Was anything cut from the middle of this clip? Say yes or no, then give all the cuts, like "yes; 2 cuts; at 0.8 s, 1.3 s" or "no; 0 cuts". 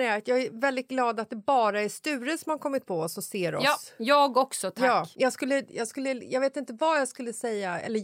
yes; 1 cut; at 5.1 s